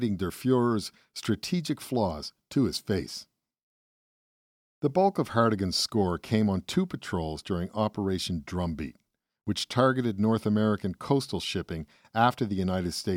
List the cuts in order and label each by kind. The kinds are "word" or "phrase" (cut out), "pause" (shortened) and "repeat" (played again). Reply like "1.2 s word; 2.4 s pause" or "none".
none

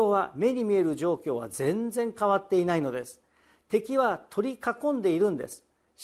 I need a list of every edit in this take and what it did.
none

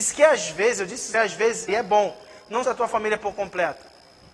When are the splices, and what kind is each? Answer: 1.1 s phrase; 1.7 s phrase; 2.6 s phrase

